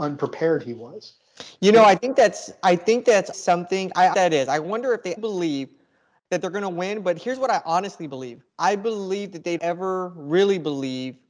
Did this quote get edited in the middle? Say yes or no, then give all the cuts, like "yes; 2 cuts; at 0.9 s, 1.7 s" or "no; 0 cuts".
yes; 5 cuts; at 3.3 s, 4.1 s, 5.2 s, 8.5 s, 9.6 s